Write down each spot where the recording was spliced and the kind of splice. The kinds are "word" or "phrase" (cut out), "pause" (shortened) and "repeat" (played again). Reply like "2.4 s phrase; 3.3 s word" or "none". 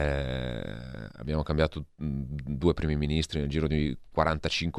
none